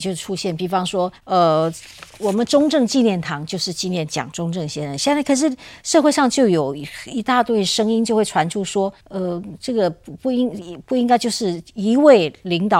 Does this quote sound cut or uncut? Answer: cut